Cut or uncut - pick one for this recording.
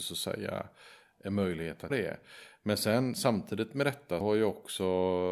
cut